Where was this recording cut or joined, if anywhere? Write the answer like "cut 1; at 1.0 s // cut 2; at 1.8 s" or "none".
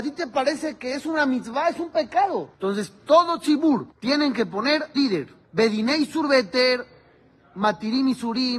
cut 1; at 2.5 s // cut 2; at 3.9 s // cut 3; at 5.0 s // cut 4; at 5.4 s